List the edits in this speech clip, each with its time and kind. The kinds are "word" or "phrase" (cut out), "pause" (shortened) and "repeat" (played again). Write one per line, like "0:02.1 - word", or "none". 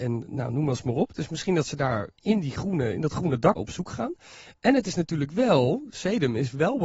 0:03.6 - word